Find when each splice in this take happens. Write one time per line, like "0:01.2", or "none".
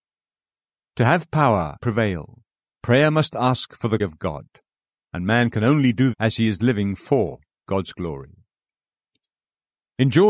0:01.8
0:04.0
0:06.1